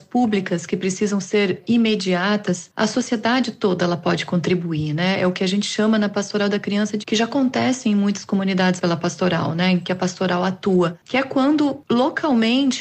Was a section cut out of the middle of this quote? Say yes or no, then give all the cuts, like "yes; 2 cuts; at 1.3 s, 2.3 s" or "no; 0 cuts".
yes; 2 cuts; at 7.0 s, 8.8 s